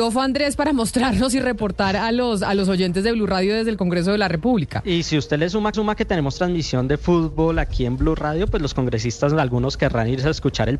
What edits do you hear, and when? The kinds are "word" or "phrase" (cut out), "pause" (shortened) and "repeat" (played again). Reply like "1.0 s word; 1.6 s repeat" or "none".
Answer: 5.7 s repeat